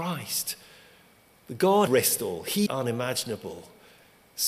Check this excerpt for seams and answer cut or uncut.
cut